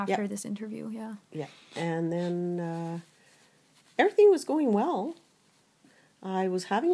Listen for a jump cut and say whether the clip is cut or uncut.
uncut